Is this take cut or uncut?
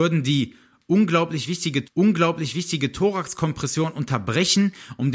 cut